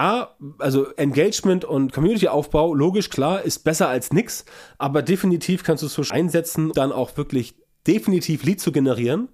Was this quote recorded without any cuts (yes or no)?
no